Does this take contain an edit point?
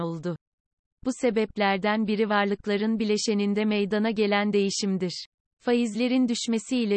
no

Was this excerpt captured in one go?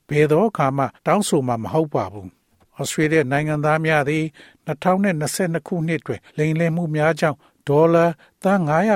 no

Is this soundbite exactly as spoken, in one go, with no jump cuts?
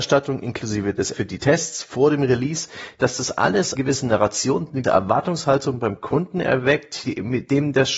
no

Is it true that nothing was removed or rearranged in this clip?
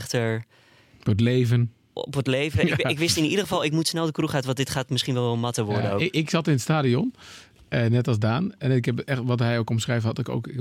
yes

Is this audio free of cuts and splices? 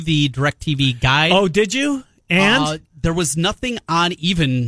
yes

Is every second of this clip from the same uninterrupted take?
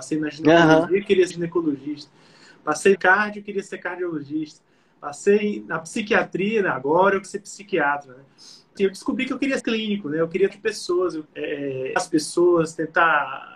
no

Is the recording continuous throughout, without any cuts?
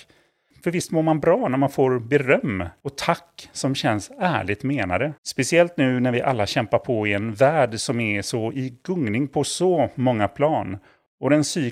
no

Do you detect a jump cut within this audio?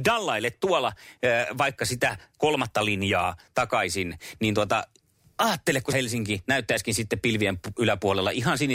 yes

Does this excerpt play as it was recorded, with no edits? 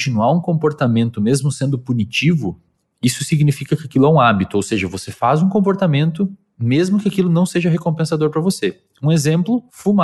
yes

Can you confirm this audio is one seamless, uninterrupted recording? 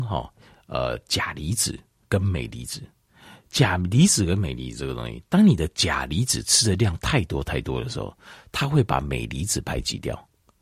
yes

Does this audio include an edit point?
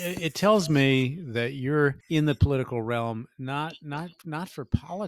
yes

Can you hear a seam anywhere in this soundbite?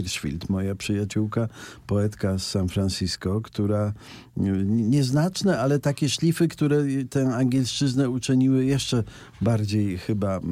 no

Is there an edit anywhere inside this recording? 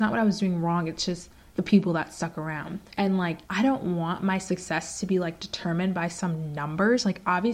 yes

